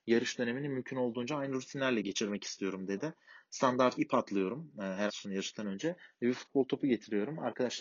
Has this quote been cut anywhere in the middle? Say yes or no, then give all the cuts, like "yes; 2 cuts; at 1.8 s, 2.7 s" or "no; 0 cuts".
yes; 2 cuts; at 3.9 s, 5.1 s